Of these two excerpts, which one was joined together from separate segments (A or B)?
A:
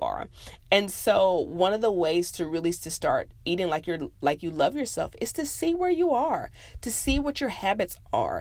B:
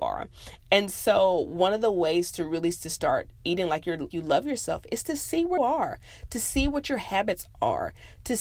B